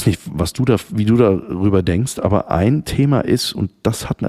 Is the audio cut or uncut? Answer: uncut